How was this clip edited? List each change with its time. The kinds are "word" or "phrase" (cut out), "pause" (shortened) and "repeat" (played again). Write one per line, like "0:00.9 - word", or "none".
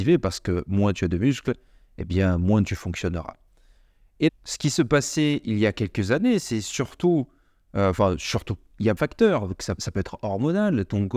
0:04.3 - word
0:09.0 - word
0:09.8 - word